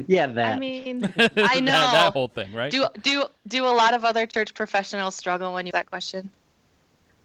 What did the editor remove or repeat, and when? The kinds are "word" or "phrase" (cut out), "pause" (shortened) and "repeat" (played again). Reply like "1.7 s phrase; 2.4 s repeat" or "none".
5.7 s word